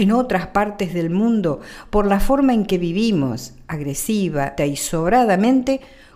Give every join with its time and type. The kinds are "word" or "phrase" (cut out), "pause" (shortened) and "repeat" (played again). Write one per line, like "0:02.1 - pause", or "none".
0:04.6 - word